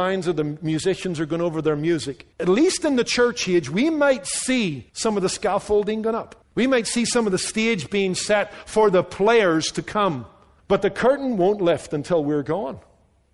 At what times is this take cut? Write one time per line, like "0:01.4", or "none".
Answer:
0:02.3
0:04.9
0:06.4
0:10.6